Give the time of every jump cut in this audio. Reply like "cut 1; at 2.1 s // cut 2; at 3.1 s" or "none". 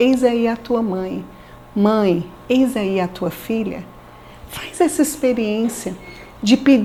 none